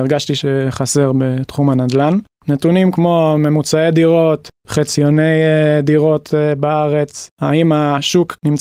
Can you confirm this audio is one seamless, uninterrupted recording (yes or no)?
yes